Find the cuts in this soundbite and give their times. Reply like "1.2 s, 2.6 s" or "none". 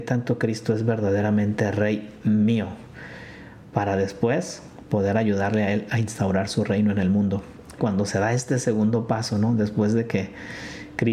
7.8 s